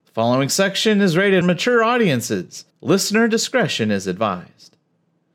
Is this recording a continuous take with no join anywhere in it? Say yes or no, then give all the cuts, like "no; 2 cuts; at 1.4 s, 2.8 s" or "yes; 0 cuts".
no; 2 cuts; at 1.4 s, 2.7 s